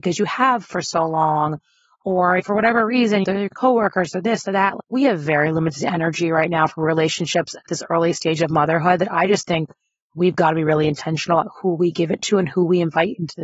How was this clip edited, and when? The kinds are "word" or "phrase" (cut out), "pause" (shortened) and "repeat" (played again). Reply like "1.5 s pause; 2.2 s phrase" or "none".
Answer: none

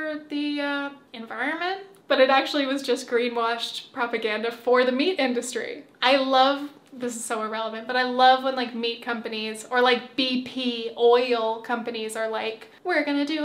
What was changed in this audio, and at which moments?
none

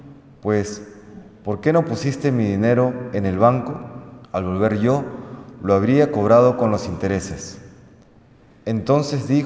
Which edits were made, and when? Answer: 4.2 s pause

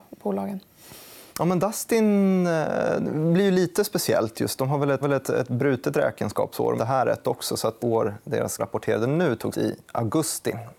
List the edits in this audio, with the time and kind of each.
1.3 s pause; 5.0 s repeat; 6.8 s phrase; 7.8 s word; 8.6 s phrase; 9.5 s word

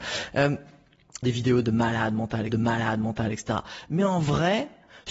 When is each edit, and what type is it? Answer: 1.2 s phrase; 2.5 s repeat

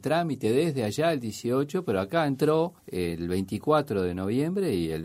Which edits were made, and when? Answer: 2.8 s pause

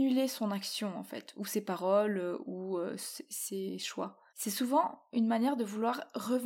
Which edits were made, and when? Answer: 4.3 s pause

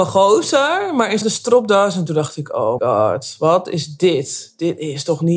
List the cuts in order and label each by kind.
1.2 s phrase; 2.8 s word

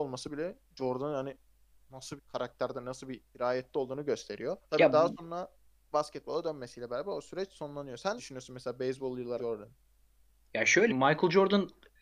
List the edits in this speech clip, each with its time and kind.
2.2 s phrase; 3.2 s pause; 4.6 s pause; 5.6 s pause; 8.2 s word; 9.4 s word; 10.9 s word

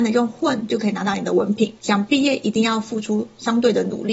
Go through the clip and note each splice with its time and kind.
1.8 s pause

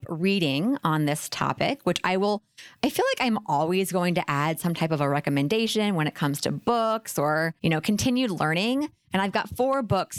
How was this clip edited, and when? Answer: 7.6 s pause

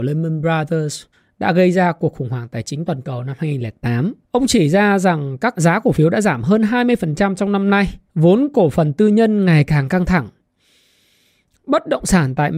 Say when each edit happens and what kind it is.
1.1 s pause; 4.2 s pause; 5.5 s word; 8.1 s pause

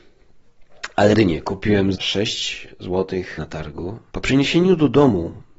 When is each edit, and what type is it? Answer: 1.1 s word; 1.9 s word; 3.4 s word; 4.1 s word

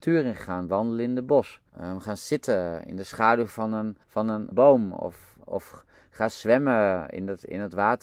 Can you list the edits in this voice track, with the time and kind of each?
1.7 s pause; 4.0 s pause; 4.5 s phrase; 5.4 s pause

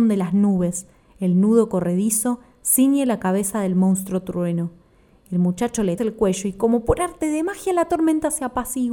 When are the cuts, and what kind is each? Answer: 6.0 s word

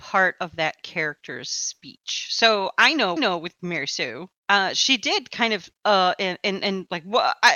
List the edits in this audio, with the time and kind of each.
3.2 s repeat; 5.8 s pause

